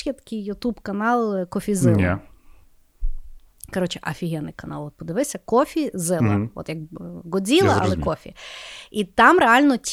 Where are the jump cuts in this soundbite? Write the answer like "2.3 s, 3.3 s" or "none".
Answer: none